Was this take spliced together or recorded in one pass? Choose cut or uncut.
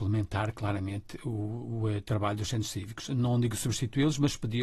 uncut